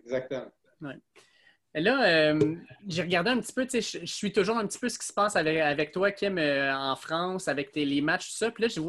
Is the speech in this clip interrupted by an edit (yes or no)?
no